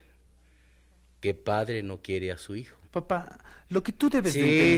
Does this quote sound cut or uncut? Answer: cut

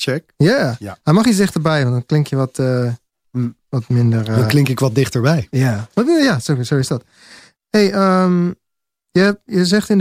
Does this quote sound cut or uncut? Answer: uncut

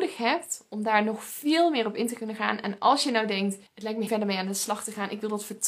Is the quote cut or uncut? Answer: cut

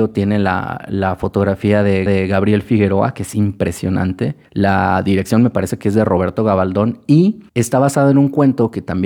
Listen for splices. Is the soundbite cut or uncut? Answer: cut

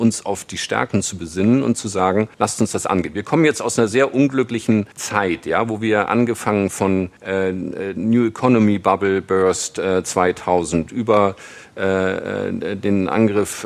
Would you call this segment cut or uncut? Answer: cut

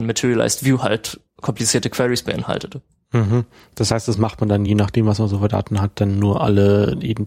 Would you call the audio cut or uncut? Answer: uncut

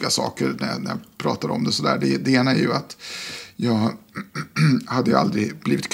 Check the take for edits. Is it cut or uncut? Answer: uncut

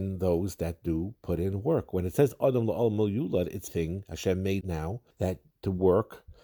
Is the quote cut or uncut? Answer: cut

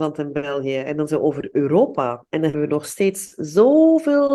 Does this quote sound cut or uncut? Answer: cut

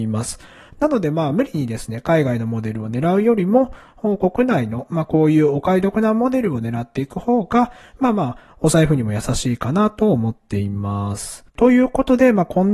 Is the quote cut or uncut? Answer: cut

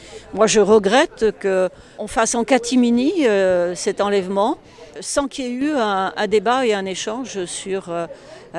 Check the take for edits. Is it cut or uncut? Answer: uncut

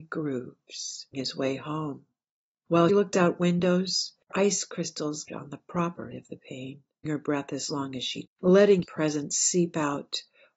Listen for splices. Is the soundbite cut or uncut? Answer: cut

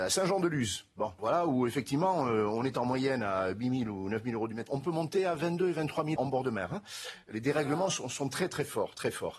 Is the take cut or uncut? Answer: cut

